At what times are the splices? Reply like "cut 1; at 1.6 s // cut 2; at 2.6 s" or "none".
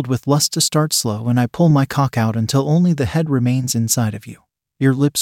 none